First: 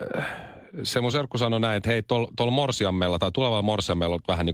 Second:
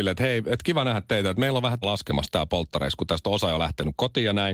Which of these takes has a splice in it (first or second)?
second